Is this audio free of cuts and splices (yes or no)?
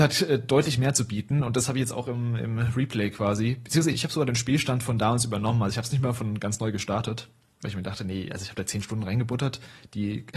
yes